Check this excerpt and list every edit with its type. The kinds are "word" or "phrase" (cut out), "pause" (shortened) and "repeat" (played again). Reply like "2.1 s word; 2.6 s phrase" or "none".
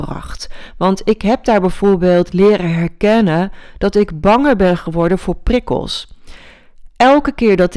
none

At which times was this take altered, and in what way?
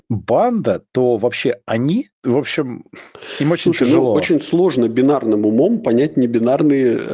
none

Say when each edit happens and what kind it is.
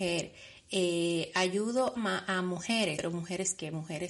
2.0 s word; 3.0 s word

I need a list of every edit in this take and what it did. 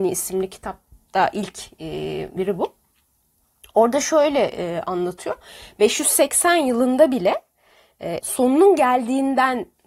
2.4 s word; 8.2 s word

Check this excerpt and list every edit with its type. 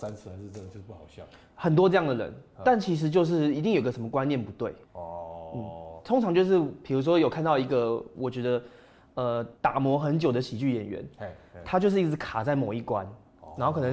4.8 s pause; 9.6 s pause

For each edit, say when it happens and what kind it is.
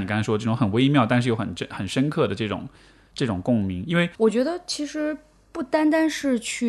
4.1 s word

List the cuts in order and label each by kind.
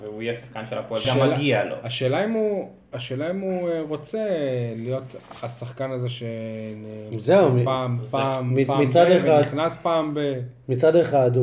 1.0 s word

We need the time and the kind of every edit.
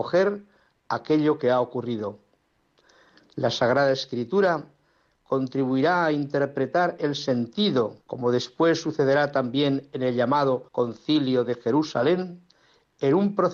8.0 s pause; 10.7 s pause

